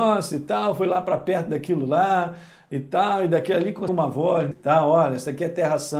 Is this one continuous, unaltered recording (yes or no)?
no